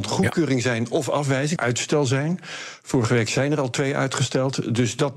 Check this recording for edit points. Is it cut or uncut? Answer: cut